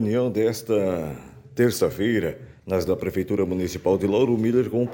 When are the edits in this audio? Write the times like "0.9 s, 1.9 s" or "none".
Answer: 2.9 s